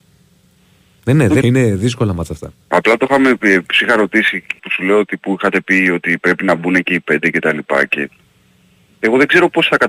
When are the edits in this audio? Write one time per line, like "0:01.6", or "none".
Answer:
0:01.4
0:02.6
0:04.6